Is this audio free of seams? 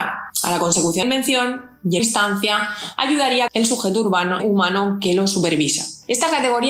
no; 4 cuts; at 1.0 s, 2.0 s, 3.5 s, 4.4 s

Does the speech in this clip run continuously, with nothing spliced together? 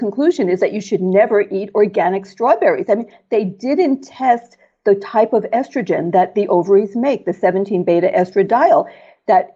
yes; 0 cuts

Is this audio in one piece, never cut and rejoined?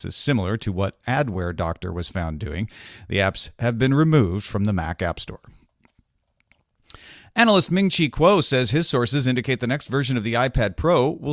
yes; 0 cuts

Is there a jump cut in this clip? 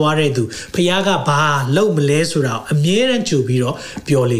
no; 0 cuts

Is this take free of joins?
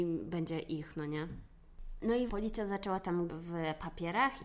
no; 2 cuts; at 2.3 s, 3.3 s

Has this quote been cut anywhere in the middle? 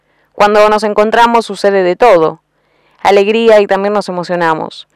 no; 0 cuts

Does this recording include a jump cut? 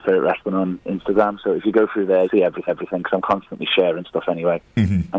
yes; 2 cuts; at 2.2 s, 2.7 s

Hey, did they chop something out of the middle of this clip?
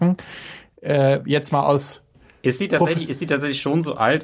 no; 0 cuts

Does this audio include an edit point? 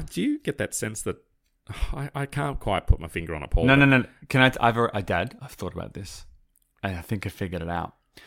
no; 0 cuts

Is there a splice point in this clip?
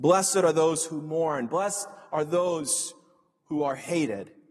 no; 0 cuts

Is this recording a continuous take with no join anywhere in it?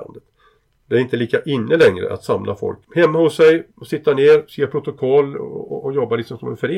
no; 1 cut; at 2.8 s

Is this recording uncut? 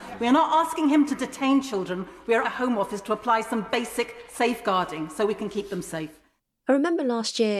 no; 1 cut; at 2.4 s

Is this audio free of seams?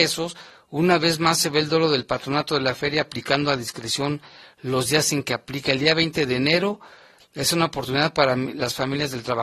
yes; 0 cuts

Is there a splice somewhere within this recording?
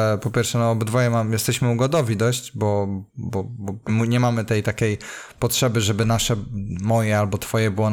yes; 2 cuts; at 3.1 s, 3.9 s

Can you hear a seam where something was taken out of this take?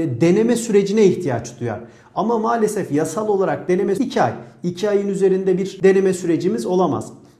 yes; 1 cut; at 4.0 s

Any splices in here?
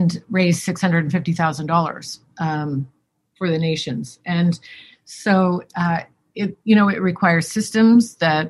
no; 0 cuts

